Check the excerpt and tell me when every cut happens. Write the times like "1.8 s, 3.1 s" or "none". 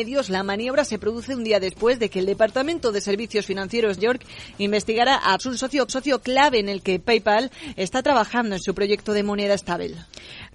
4.0 s, 5.4 s, 5.9 s